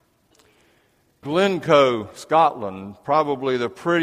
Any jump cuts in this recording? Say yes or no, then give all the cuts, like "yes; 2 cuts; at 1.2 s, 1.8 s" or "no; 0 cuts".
yes; 1 cut; at 1.2 s